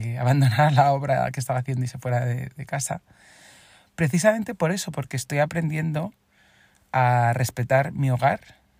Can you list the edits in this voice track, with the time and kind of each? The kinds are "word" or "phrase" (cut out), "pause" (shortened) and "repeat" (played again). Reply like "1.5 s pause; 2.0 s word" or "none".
none